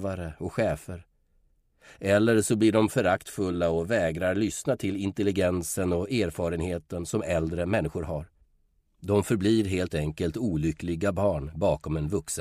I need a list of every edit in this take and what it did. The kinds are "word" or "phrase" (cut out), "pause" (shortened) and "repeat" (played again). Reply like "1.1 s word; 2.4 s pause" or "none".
none